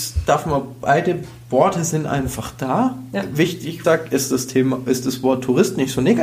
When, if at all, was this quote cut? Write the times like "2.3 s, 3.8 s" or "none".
3.8 s